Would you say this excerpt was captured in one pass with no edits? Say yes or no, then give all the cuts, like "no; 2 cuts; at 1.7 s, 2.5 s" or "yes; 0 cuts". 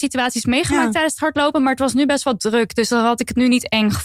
yes; 0 cuts